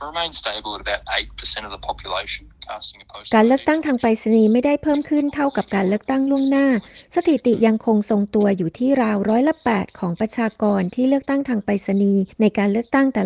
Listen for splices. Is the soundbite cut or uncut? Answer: cut